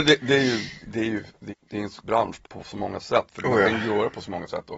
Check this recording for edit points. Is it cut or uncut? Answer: cut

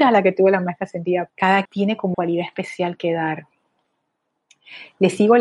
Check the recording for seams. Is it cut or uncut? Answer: cut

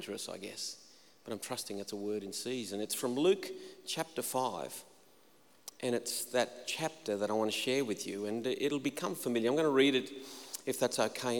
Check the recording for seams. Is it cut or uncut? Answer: cut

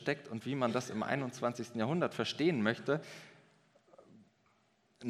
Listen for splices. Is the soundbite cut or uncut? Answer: uncut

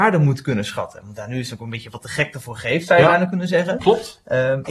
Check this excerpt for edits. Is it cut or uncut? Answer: uncut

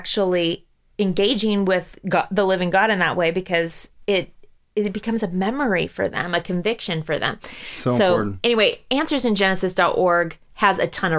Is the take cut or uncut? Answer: uncut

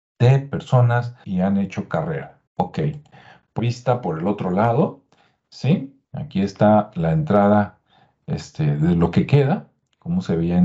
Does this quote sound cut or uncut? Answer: cut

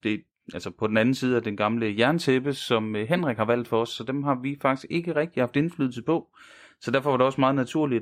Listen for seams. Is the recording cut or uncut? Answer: uncut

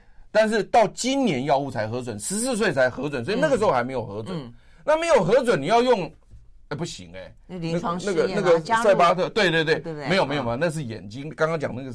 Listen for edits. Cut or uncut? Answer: uncut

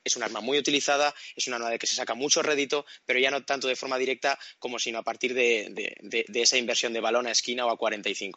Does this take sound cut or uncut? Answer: uncut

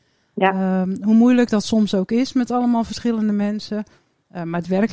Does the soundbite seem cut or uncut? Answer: uncut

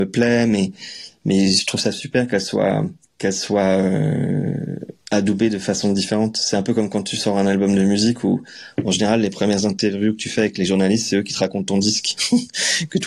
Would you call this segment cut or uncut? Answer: cut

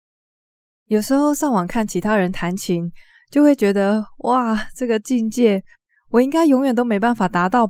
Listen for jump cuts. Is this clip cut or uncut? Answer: uncut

